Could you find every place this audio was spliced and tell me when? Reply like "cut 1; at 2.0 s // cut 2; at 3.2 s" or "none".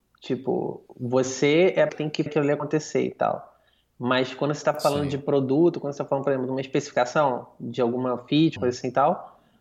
cut 1; at 1.9 s // cut 2; at 2.3 s // cut 3; at 8.6 s